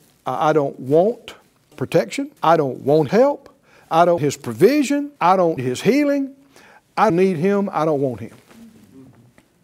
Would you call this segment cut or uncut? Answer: cut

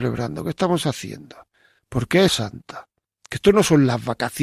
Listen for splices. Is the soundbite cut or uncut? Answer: cut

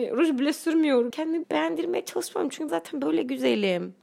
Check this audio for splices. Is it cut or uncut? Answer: cut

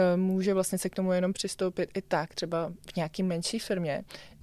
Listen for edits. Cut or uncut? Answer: uncut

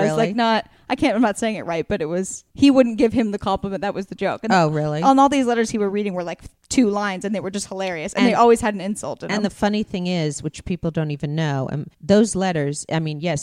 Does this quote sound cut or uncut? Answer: cut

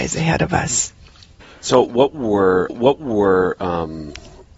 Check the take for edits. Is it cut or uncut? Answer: cut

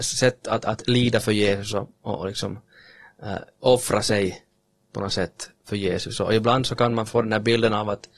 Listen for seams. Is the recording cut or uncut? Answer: cut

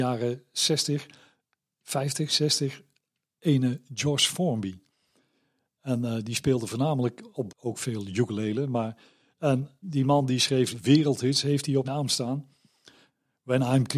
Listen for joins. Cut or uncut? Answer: cut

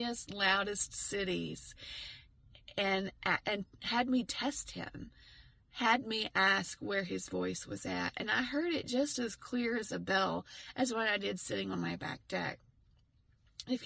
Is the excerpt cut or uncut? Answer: uncut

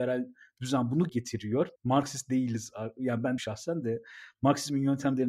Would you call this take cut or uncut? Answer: cut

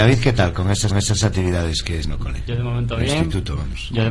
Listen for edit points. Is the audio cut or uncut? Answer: cut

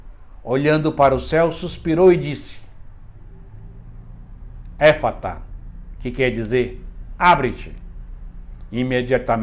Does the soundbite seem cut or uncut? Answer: uncut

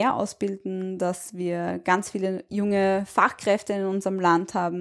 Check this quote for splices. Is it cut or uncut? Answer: uncut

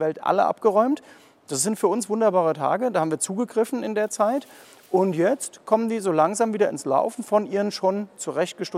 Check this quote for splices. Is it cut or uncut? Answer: uncut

